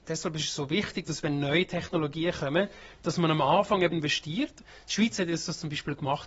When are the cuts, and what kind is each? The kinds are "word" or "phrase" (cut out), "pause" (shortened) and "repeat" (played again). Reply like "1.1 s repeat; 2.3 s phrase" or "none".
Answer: 3.9 s phrase